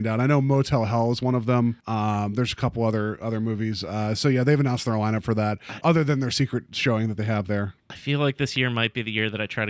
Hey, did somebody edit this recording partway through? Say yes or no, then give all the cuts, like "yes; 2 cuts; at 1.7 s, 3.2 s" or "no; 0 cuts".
yes; 1 cut; at 1.8 s